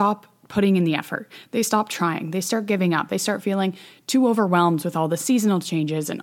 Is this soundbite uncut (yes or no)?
yes